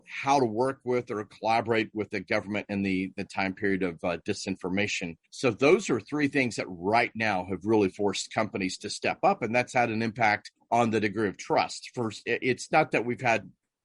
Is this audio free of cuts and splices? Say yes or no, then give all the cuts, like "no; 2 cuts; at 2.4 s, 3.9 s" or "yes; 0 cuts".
yes; 0 cuts